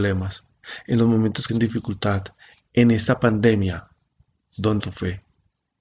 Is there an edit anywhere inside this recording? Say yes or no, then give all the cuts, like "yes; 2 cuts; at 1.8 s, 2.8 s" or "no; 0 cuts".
yes; 2 cuts; at 1.5 s, 4.8 s